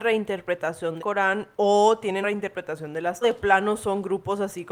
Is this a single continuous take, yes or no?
no